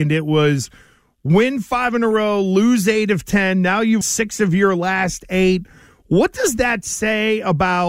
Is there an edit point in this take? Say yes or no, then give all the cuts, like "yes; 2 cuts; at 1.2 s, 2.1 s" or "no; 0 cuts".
yes; 1 cut; at 4.0 s